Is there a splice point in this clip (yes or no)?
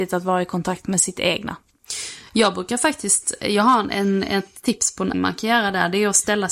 yes